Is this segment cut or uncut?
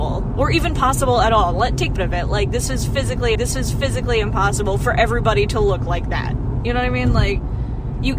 cut